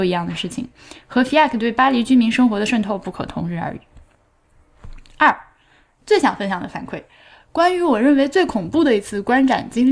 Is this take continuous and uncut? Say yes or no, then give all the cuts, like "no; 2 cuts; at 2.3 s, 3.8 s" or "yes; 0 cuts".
yes; 0 cuts